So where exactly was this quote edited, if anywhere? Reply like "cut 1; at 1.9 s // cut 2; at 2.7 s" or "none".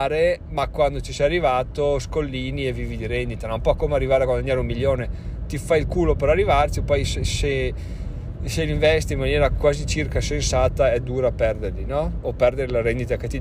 none

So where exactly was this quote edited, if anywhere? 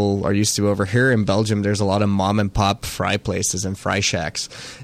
none

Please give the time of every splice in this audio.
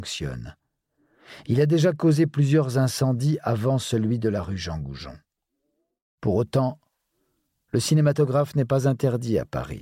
none

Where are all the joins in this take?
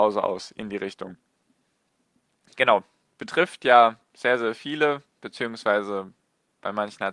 none

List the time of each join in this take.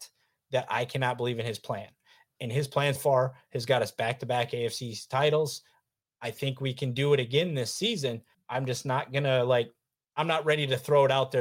cut 1; at 3.0 s // cut 2; at 8.3 s

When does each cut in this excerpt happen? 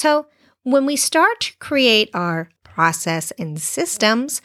cut 1; at 2.6 s

